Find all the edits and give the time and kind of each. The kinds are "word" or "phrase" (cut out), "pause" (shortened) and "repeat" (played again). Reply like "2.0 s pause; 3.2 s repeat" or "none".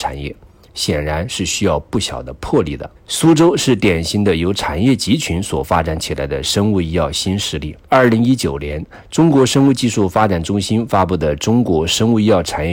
3.0 s pause; 7.8 s pause